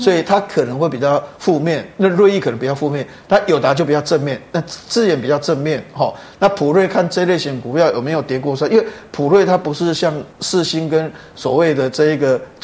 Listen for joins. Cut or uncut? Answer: cut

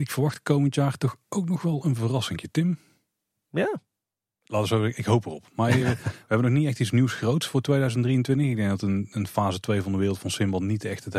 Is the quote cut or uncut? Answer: uncut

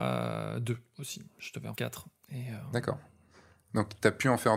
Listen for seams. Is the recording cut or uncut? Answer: cut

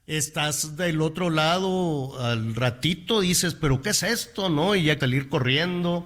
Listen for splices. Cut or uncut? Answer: cut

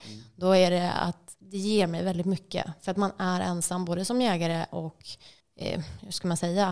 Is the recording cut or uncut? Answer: cut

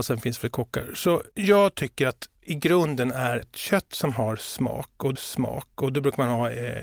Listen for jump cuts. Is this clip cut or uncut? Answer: cut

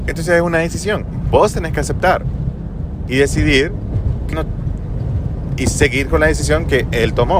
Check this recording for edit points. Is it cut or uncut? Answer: cut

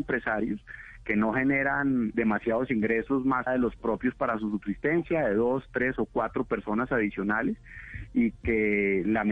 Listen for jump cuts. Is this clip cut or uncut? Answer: cut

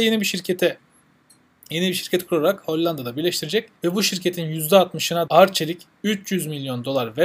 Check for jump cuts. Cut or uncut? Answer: cut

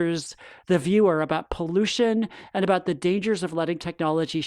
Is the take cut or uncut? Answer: uncut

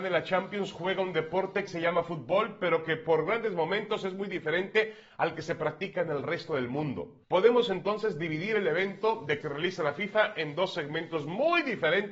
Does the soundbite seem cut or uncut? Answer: cut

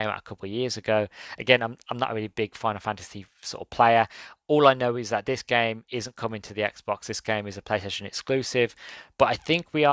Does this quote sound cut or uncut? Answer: uncut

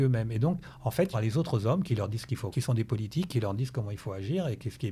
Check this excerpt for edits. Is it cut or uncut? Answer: cut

